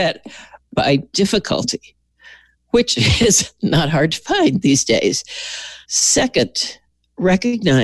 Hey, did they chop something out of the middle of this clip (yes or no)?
yes